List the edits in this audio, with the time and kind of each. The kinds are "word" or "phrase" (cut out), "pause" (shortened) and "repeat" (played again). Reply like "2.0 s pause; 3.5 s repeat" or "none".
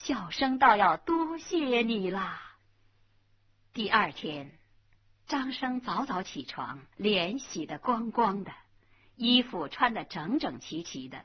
2.6 s pause; 6.9 s pause